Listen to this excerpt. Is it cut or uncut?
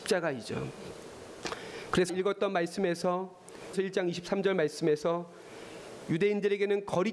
cut